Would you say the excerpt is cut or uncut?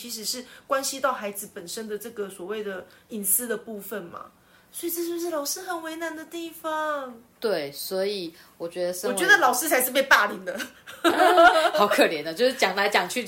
uncut